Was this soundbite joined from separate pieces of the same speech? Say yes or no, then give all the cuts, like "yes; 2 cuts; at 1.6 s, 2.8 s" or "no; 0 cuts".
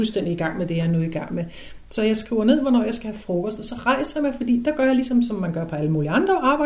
no; 0 cuts